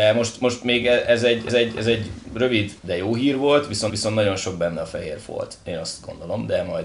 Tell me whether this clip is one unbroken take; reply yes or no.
no